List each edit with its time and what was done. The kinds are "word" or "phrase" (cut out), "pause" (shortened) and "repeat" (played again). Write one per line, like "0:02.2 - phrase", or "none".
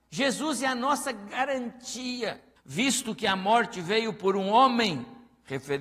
0:02.6 - pause